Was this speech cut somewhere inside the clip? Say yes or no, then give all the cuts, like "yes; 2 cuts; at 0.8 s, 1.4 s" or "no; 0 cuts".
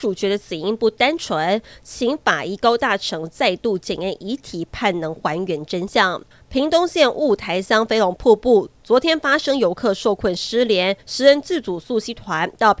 yes; 2 cuts; at 6.3 s, 11.0 s